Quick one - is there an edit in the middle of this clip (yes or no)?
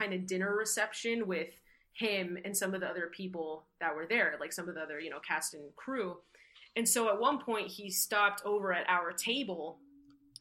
no